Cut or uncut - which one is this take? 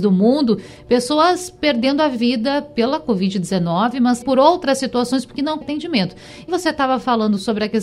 cut